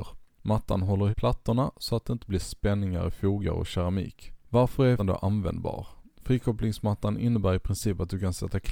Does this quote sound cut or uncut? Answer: cut